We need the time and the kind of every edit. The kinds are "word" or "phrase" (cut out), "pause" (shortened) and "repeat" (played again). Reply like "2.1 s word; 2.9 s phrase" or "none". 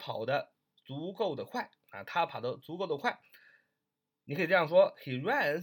none